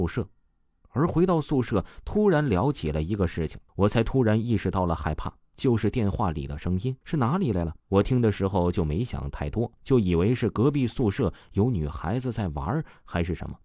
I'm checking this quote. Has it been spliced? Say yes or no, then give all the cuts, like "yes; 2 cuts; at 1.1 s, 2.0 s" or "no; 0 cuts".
yes; 4 cuts; at 3.7 s, 7.0 s, 7.8 s, 9.8 s